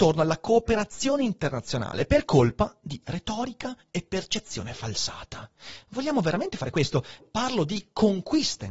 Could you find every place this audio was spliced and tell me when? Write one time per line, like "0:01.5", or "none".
0:07.2